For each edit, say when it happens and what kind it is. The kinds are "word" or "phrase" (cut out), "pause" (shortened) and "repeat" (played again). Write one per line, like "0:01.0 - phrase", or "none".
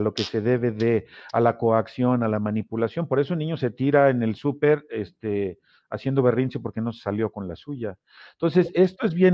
none